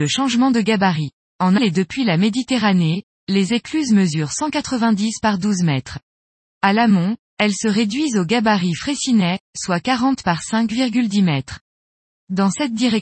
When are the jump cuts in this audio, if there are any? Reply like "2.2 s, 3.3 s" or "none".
1.6 s